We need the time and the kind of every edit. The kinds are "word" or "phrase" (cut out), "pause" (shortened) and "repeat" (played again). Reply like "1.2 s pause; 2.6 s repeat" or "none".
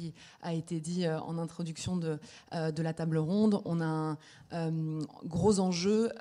none